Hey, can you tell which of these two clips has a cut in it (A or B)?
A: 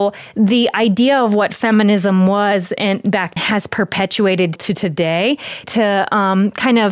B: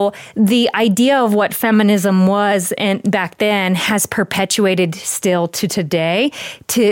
A